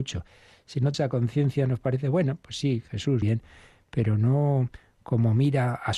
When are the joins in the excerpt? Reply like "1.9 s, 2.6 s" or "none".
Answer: 0.9 s, 3.2 s